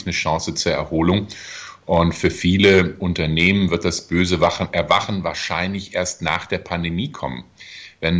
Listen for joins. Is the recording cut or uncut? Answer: uncut